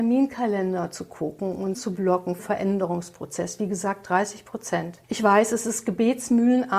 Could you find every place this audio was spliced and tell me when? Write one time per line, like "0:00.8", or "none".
0:01.7
0:02.4
0:05.0